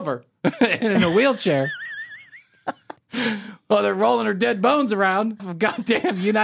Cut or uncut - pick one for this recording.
cut